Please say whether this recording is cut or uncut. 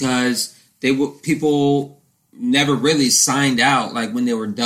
uncut